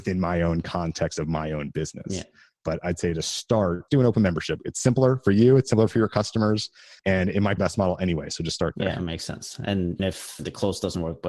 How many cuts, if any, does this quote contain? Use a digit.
4